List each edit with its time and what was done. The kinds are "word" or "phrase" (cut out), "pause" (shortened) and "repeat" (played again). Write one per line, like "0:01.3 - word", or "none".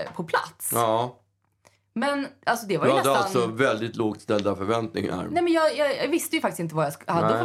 none